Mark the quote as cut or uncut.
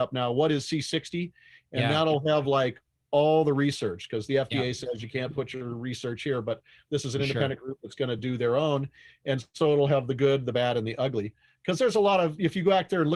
uncut